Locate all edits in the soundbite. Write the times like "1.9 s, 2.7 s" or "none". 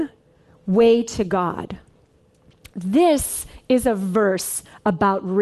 none